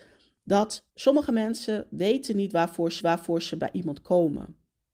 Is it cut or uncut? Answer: cut